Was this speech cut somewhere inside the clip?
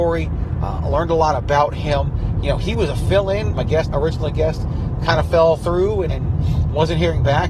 yes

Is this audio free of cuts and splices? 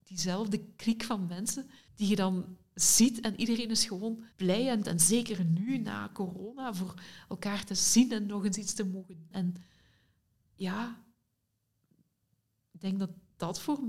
no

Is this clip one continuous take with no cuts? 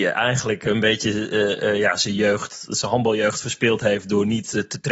yes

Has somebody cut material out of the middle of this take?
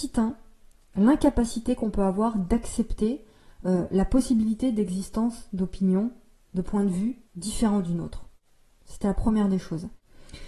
yes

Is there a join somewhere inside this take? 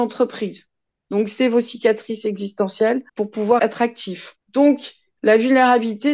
yes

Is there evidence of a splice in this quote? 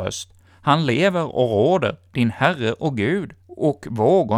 yes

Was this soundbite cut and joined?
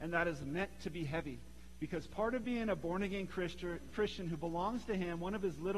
no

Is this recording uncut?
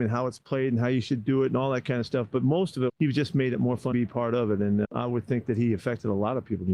no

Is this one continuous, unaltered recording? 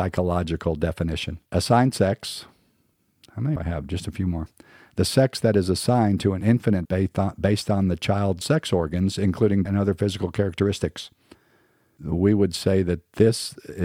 no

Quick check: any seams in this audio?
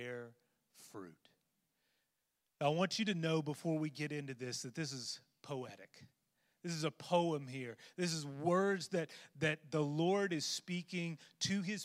no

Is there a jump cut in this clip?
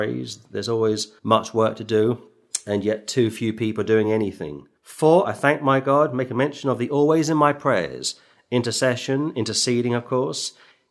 yes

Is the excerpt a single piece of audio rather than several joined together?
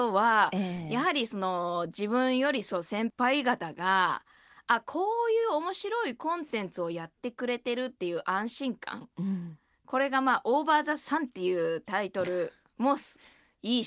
yes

